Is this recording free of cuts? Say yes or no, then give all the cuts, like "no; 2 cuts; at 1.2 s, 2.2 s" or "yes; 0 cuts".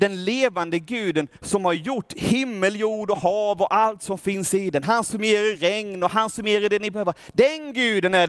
yes; 0 cuts